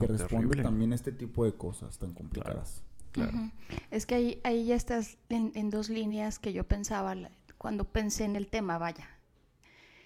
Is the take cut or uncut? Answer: cut